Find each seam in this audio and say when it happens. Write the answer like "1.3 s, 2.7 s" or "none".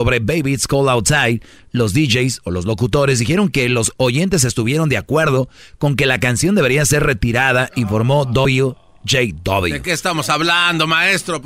none